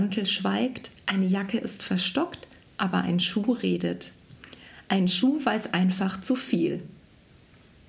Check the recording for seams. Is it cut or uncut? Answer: uncut